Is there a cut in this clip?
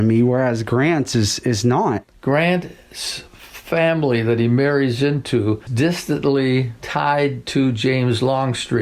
yes; 1 cut; at 5.7 s

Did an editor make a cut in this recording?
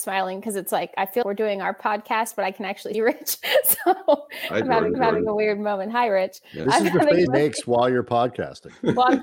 yes; 4 cuts; at 1.2 s, 2.9 s, 4.9 s, 7.3 s

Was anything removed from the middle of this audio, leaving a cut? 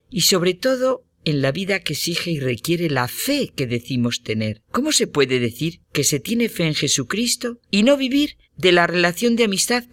yes; 5 cuts; at 1.1 s, 4.7 s, 5.8 s, 7.6 s, 8.4 s

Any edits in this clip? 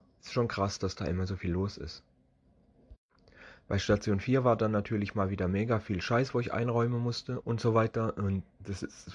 yes; 1 cut; at 7.4 s

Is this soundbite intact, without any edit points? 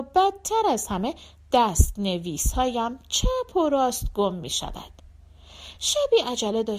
yes; 0 cuts

